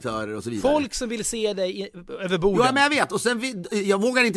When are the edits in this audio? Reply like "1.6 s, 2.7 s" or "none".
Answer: none